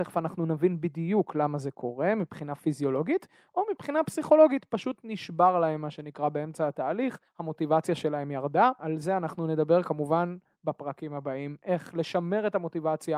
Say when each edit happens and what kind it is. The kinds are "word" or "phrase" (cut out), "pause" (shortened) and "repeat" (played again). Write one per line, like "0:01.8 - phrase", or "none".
0:07.3 - pause
0:08.8 - word